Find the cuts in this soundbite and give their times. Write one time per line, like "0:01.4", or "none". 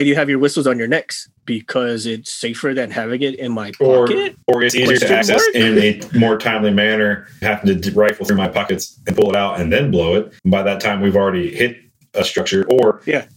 0:01.4
0:04.4
0:07.4
0:10.4